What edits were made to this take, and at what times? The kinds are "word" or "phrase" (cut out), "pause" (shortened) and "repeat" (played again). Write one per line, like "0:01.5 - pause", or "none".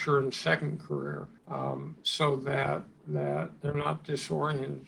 0:01.4 - pause